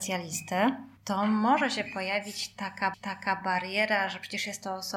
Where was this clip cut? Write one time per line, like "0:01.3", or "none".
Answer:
0:01.0
0:02.9